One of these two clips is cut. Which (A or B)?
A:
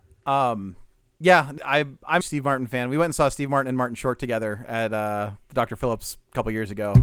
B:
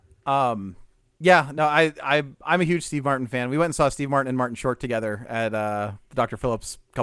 A